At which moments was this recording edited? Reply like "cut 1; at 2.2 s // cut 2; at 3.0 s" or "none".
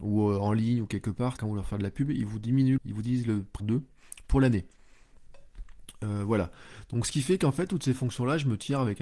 cut 1; at 1.4 s // cut 2; at 2.8 s // cut 3; at 3.6 s